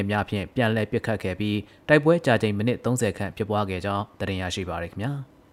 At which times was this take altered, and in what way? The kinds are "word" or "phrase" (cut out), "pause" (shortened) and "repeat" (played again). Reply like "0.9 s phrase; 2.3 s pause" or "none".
none